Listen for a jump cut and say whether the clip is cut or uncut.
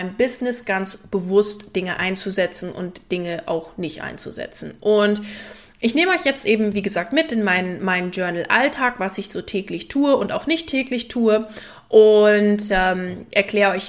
uncut